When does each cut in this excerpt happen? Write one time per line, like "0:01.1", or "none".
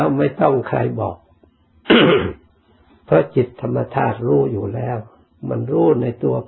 0:02.5